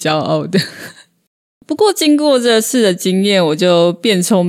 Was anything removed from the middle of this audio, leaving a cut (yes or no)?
no